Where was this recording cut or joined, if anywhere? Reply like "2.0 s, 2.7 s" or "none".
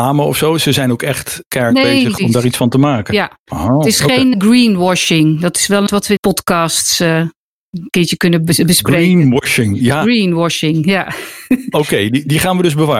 2.2 s, 4.3 s, 5.9 s, 6.2 s